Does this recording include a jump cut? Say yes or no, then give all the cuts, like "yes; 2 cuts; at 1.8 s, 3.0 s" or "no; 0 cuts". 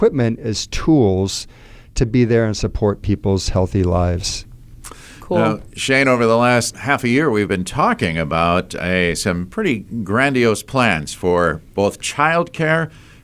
yes; 1 cut; at 6.7 s